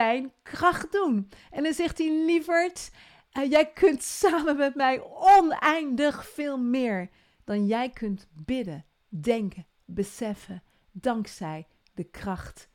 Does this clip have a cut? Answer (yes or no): no